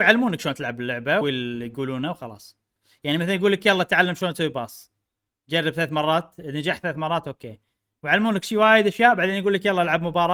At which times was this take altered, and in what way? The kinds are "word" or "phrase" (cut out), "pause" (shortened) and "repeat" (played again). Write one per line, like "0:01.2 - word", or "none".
0:01.2 - word